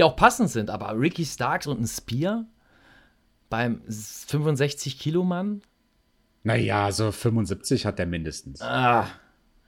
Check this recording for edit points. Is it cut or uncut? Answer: uncut